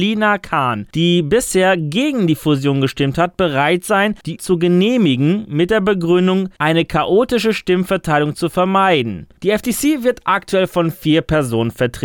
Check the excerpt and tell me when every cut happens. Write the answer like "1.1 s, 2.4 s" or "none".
4.4 s